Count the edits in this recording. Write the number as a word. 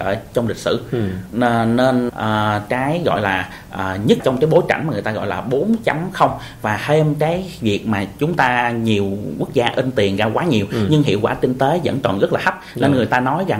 two